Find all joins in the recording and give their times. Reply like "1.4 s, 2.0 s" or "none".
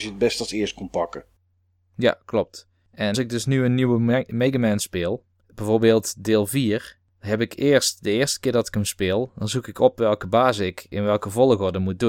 3.1 s